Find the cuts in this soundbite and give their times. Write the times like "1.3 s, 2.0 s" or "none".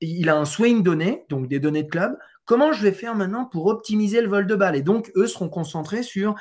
none